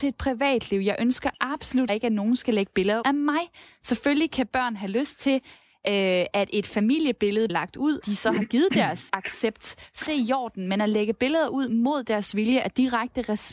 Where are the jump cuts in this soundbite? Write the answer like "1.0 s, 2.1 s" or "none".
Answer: 1.9 s, 3.0 s, 7.5 s, 8.0 s, 9.1 s, 10.1 s